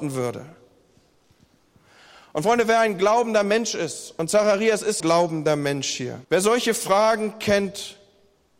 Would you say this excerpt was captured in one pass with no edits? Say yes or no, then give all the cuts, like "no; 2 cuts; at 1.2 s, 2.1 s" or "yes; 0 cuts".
no; 2 cuts; at 5.0 s, 6.2 s